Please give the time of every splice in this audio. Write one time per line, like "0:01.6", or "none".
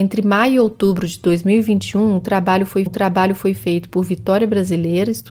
0:02.9